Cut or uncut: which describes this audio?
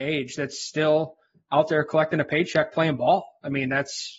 uncut